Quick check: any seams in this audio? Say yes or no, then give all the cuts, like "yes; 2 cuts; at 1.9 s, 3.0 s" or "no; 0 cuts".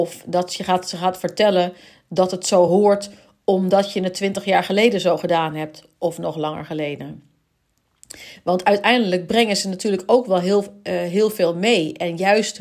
no; 0 cuts